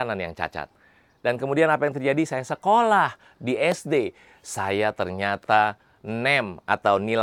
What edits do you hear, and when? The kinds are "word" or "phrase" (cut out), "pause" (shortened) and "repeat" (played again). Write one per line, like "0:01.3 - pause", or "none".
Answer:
none